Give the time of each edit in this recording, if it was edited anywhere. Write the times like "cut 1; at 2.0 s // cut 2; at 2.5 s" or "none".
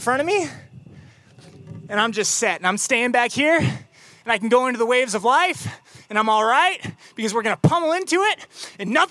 none